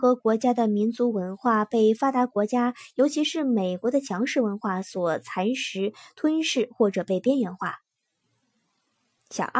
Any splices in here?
no; 0 cuts

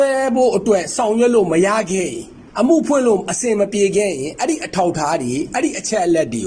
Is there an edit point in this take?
yes; 1 cut; at 2.5 s

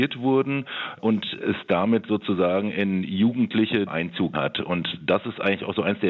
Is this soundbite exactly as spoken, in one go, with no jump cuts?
no; 2 cuts; at 3.9 s, 4.3 s

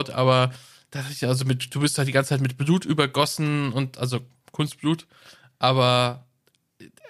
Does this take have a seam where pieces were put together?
no; 0 cuts

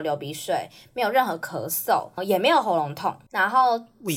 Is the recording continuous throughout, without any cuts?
no; 1 cut; at 2.2 s

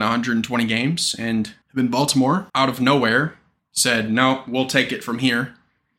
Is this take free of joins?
no; 3 cuts; at 1.6 s, 2.5 s, 3.6 s

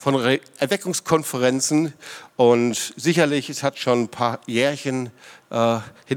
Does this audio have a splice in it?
no; 0 cuts

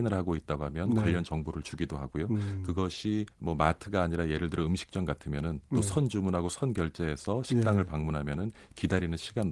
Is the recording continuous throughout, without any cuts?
no; 1 cut; at 3.3 s

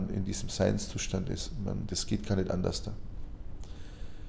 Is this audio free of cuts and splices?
yes; 0 cuts

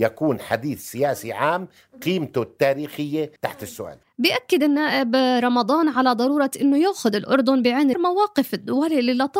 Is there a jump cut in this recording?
yes; 2 cuts; at 3.4 s, 7.9 s

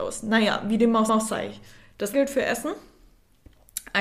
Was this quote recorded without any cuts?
no; 2 cuts; at 1.1 s, 2.1 s

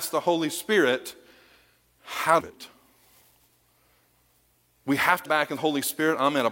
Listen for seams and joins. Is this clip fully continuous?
no; 3 cuts; at 2.4 s, 5.3 s, 5.6 s

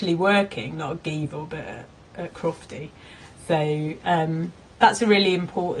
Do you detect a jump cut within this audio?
no; 0 cuts

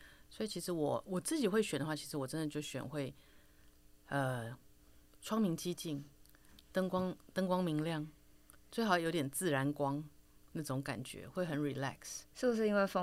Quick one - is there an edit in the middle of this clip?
no; 0 cuts

